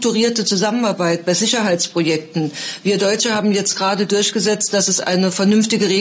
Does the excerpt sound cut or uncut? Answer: uncut